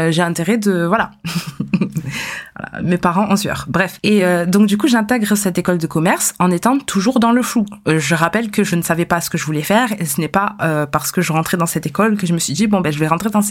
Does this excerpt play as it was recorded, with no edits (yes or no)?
yes